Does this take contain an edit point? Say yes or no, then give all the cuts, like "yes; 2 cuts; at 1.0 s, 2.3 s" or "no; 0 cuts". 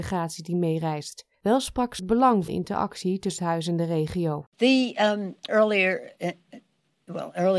yes; 6 cuts; at 1.3 s, 2.0 s, 2.5 s, 3.4 s, 4.5 s, 5.5 s